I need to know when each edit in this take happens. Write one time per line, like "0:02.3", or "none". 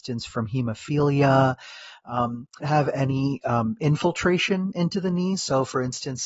0:02.6